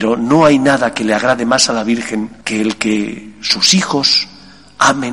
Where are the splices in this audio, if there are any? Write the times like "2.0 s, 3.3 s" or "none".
2.4 s